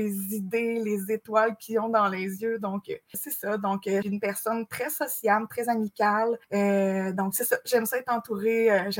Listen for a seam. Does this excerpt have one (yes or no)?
yes